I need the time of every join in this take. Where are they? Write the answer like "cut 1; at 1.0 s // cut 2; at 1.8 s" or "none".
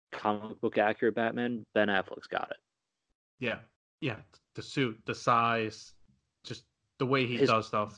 none

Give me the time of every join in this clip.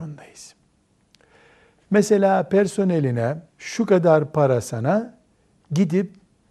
cut 1; at 3.5 s

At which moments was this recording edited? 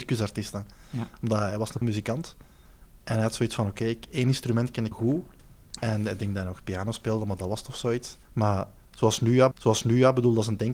cut 1; at 1.8 s // cut 2; at 4.9 s // cut 3; at 8.2 s // cut 4; at 9.5 s

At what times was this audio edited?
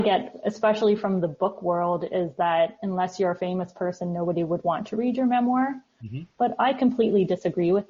none

